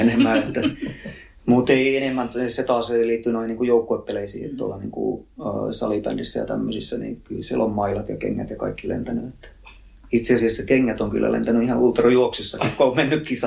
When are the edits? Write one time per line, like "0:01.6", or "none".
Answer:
none